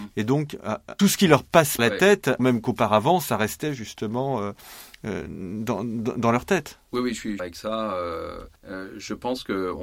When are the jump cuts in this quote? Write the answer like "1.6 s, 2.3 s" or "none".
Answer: 1.0 s, 1.8 s, 2.4 s, 7.4 s, 8.6 s